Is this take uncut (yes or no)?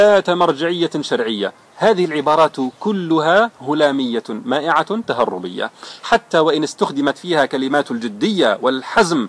yes